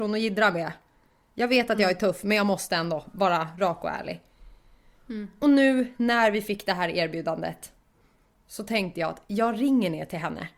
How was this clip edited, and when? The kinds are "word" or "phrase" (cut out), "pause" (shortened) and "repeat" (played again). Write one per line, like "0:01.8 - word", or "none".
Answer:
none